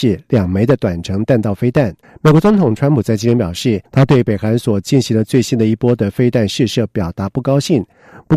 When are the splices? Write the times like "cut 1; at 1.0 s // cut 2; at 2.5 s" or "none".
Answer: cut 1; at 2.0 s // cut 2; at 3.9 s